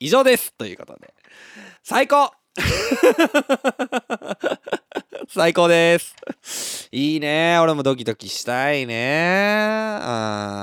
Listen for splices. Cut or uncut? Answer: cut